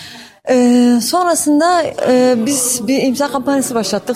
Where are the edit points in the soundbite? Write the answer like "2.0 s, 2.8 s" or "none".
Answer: none